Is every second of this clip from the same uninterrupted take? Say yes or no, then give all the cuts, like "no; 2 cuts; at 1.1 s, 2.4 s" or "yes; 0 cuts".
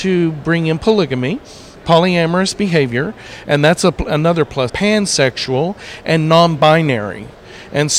no; 1 cut; at 4.7 s